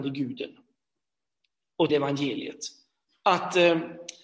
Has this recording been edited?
yes; 1 cut; at 1.9 s

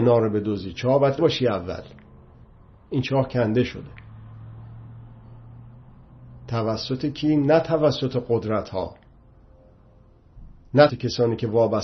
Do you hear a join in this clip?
yes; 2 cuts; at 1.2 s, 10.9 s

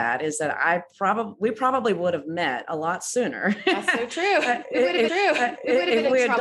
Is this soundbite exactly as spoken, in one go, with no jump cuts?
no; 1 cut; at 5.1 s

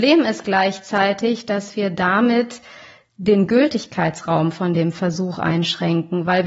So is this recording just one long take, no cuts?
yes; 0 cuts

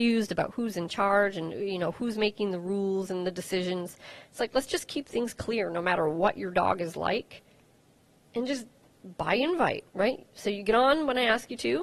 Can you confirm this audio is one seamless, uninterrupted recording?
no; 2 cuts; at 7.9 s, 9.9 s

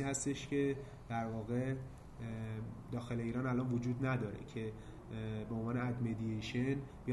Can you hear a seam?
no; 0 cuts

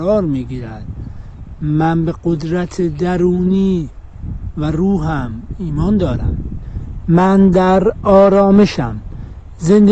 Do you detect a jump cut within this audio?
no; 0 cuts

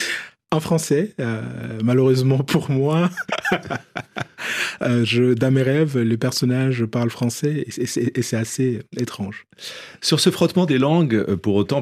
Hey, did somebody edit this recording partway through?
no; 0 cuts

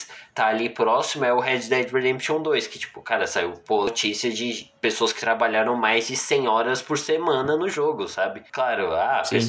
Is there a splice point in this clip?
yes; 1 cut; at 4.8 s

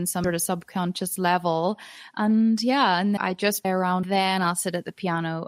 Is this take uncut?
no; 3 cuts; at 3.2 s, 3.6 s, 4.0 s

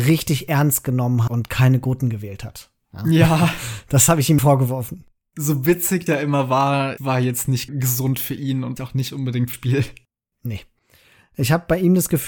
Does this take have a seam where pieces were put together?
yes; 7 cuts; at 1.3 s, 4.4 s, 6.1 s, 7.0 s, 7.7 s, 8.8 s, 9.5 s

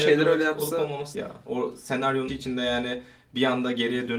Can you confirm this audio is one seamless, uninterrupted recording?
no; 2 cuts; at 1.1 s, 2.3 s

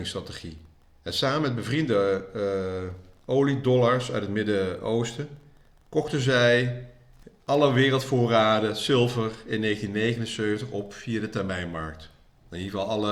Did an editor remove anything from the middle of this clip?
no; 0 cuts

